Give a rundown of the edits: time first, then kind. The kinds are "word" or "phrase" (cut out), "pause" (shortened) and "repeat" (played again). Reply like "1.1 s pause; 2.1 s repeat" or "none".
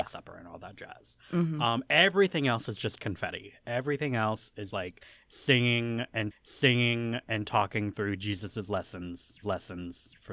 4.7 s word; 6.3 s repeat; 9.4 s repeat